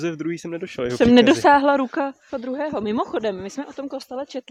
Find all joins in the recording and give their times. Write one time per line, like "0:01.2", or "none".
0:02.3